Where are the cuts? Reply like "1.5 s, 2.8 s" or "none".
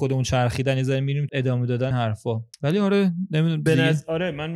1.3 s, 1.9 s, 2.5 s, 3.7 s